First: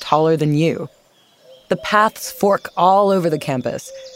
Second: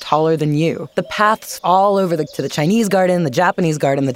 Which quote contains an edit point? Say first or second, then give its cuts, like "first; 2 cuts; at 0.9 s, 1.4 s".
second; 3 cuts; at 0.9 s, 1.6 s, 2.3 s